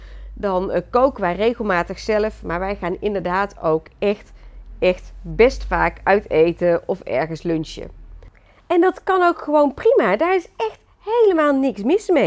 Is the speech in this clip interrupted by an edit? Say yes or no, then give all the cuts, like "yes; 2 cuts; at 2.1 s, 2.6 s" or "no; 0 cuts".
no; 0 cuts